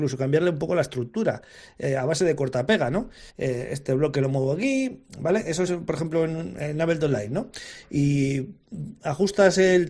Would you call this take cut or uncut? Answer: cut